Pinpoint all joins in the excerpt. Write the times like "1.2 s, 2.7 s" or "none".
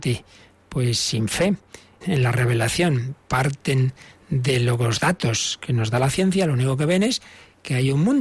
2.0 s